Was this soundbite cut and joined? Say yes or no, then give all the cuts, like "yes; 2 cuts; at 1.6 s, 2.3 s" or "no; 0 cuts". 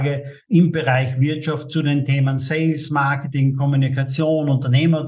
no; 0 cuts